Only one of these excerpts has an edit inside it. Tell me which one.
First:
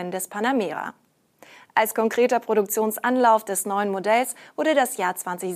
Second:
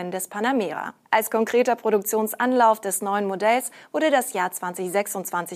second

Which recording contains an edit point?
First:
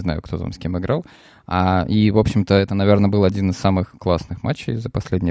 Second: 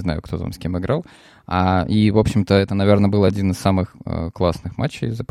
first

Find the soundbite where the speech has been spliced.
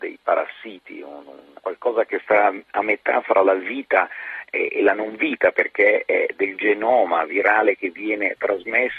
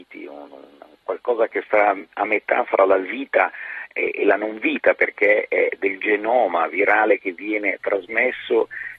first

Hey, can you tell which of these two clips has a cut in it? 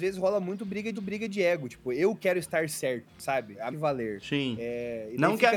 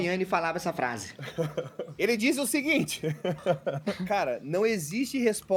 first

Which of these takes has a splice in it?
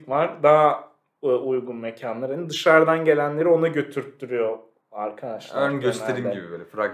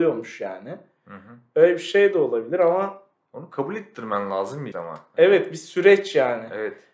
second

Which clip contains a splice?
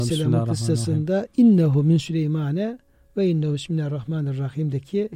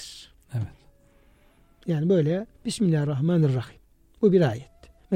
second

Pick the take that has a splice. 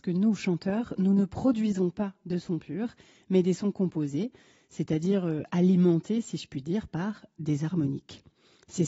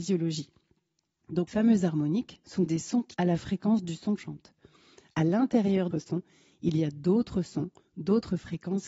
second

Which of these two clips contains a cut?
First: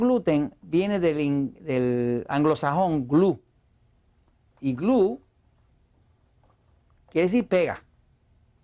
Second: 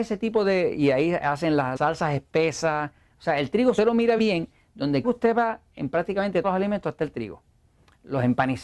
second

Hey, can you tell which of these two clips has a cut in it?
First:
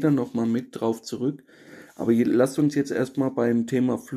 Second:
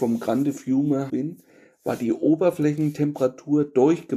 second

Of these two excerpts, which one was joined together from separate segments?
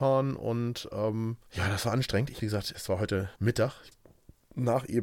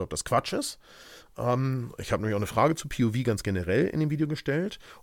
first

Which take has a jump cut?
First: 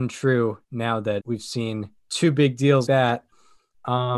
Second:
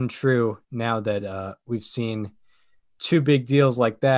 first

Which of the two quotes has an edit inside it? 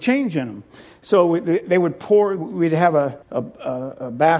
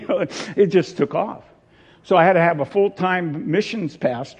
first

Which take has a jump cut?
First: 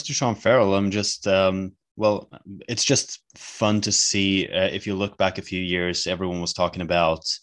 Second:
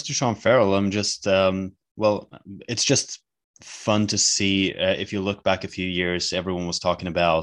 first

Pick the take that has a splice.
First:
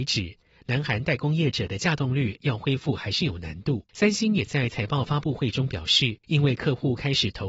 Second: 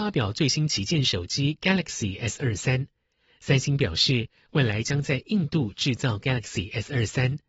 first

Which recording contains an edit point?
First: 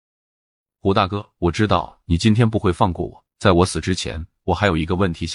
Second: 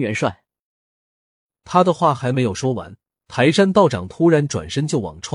second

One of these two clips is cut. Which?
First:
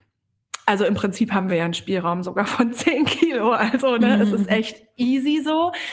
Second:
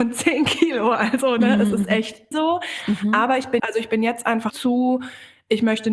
second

